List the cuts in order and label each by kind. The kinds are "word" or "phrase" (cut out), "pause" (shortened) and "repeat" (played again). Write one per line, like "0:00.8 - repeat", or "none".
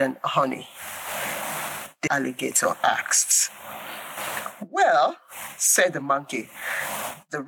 0:02.1 - word

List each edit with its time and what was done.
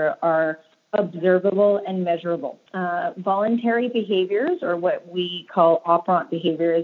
0:02.7 - pause

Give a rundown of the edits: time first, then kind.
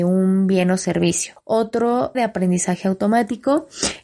0:02.1 - phrase

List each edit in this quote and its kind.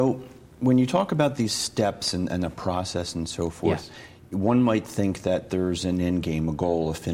none

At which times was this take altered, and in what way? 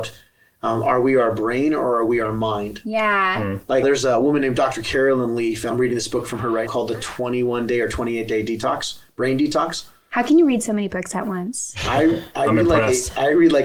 0:03.8 - word
0:05.7 - word
0:06.7 - word

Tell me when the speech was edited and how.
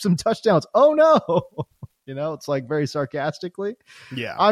none

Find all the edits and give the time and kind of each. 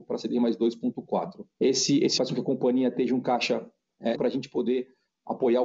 0:01.5 - pause
0:02.2 - word
0:04.1 - word

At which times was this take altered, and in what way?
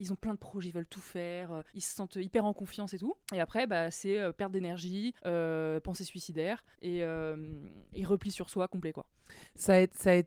0:01.7 - pause
0:05.2 - pause
0:06.7 - pause

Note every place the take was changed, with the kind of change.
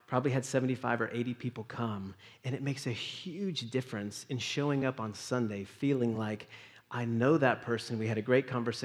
none

